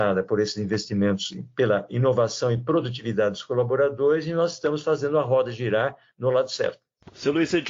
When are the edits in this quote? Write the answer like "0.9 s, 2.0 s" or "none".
none